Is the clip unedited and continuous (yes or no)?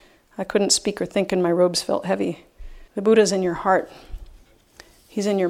no